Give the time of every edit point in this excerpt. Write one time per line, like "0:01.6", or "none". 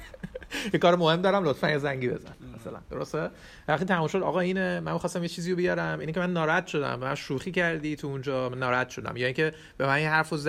none